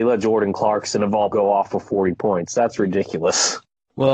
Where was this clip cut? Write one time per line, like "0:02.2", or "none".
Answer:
0:01.3